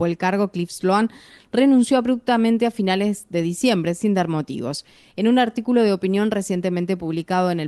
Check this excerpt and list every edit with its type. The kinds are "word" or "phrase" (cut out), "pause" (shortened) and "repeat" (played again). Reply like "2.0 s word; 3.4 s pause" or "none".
none